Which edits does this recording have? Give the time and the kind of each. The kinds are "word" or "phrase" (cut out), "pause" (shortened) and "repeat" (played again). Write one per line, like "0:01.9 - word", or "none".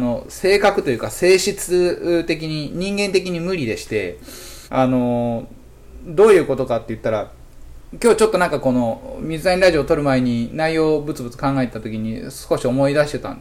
0:04.7 - pause
0:07.8 - pause